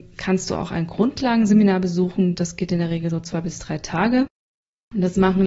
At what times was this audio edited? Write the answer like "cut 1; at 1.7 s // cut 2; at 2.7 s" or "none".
none